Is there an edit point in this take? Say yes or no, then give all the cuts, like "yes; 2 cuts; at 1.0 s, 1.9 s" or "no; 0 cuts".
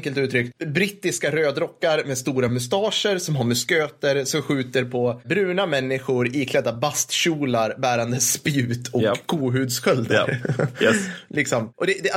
no; 0 cuts